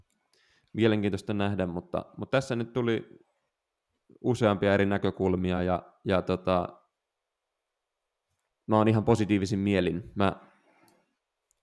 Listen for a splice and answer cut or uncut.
uncut